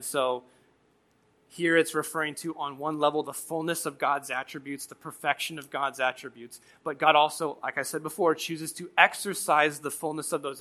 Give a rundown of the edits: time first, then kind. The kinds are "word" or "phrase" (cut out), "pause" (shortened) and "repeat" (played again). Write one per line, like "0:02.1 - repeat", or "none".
none